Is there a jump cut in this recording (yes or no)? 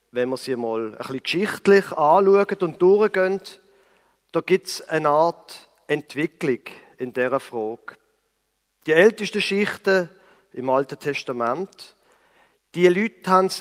no